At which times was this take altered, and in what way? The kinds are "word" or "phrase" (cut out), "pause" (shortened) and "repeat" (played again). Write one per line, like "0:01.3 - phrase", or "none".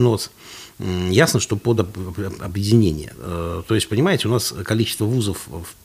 none